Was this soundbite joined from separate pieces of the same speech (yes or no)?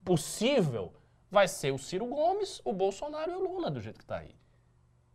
no